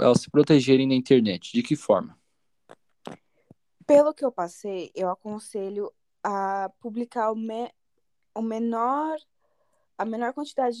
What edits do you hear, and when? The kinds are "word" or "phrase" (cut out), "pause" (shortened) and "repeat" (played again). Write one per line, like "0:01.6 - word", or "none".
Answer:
none